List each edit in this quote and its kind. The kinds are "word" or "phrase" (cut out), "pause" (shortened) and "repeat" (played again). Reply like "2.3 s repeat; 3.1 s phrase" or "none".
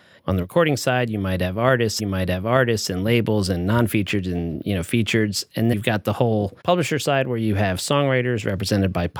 2.0 s repeat; 5.7 s word; 6.6 s pause